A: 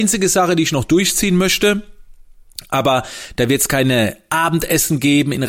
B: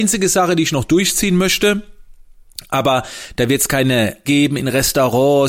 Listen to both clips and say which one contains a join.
B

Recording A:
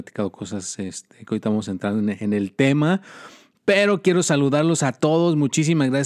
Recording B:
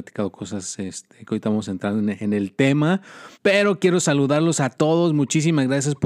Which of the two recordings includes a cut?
B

